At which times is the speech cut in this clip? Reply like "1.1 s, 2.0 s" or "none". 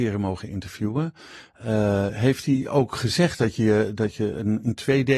none